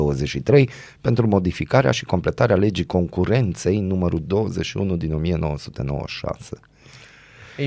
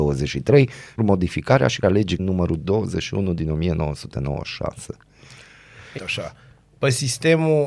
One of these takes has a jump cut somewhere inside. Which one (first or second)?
second